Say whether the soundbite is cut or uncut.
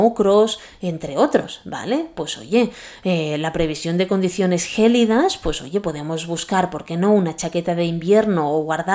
uncut